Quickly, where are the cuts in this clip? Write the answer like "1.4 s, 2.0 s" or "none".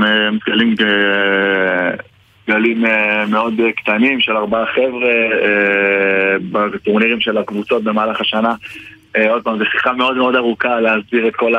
none